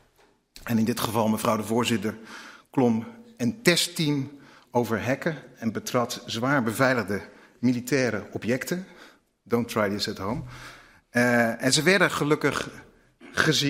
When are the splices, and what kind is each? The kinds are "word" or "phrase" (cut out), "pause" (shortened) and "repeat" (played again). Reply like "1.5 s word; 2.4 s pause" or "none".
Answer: none